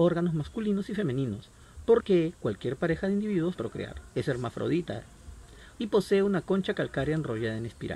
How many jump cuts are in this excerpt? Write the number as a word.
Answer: three